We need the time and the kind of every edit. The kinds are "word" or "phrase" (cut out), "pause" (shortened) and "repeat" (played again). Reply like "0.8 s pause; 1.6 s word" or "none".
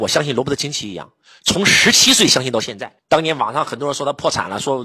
none

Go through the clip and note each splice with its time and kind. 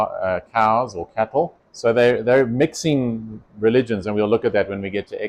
1.7 s pause; 3.5 s pause

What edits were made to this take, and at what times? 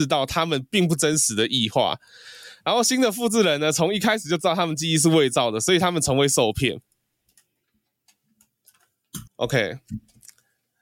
9.3 s pause

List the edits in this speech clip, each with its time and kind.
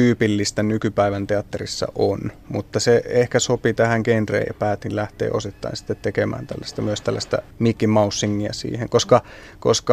7.5 s pause

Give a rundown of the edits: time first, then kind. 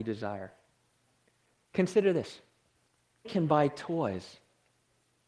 3.2 s word

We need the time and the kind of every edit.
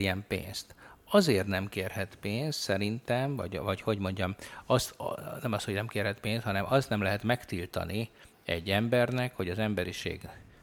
none

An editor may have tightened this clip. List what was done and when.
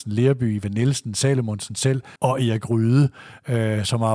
2.2 s pause

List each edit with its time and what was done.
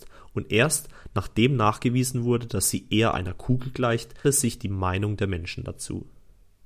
4.2 s word

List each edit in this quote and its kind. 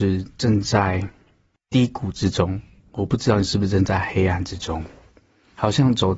none

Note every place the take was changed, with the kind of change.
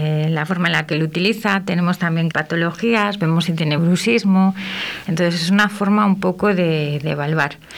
2.3 s phrase; 3.8 s phrase

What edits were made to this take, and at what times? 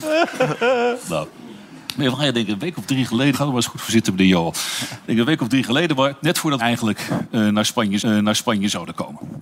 3.3 s word; 6.6 s word; 8.0 s repeat

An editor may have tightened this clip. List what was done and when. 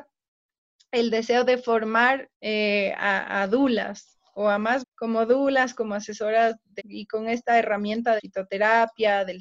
2.3 s pause; 4.8 s word; 6.8 s word; 8.2 s phrase

